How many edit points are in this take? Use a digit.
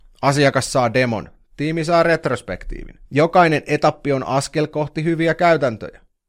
1